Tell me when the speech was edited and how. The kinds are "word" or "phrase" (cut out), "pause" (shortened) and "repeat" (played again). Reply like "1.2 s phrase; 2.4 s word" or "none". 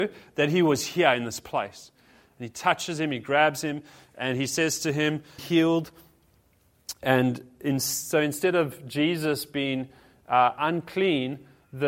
5.4 s phrase